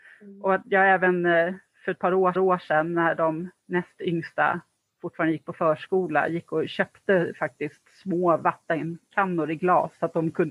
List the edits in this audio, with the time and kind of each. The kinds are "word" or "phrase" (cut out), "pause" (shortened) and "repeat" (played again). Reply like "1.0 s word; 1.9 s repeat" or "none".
2.4 s repeat